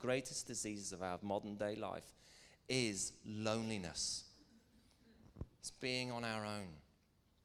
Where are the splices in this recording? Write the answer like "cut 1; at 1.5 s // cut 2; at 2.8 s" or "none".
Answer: none